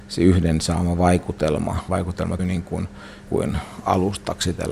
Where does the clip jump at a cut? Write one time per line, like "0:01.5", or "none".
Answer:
0:01.9
0:02.4
0:03.3